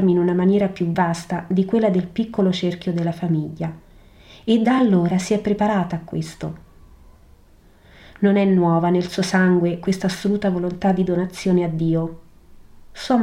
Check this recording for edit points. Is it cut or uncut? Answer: uncut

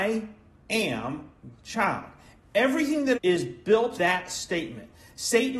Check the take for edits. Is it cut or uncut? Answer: cut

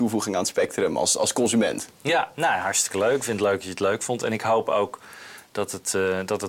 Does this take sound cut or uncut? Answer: uncut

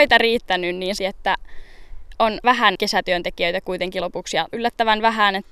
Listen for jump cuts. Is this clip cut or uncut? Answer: cut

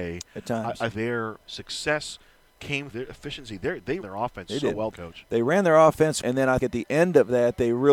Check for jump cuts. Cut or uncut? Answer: cut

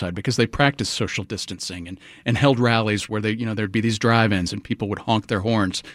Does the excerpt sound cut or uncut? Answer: uncut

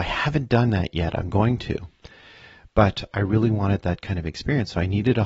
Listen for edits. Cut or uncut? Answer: uncut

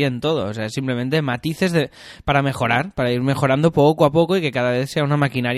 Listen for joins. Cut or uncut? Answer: uncut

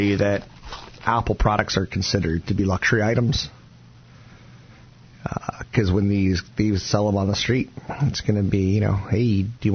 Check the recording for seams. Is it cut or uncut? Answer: uncut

